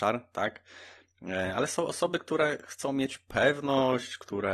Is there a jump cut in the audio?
no; 0 cuts

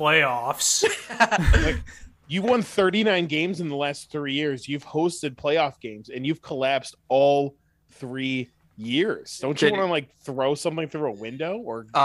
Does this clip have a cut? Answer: no; 0 cuts

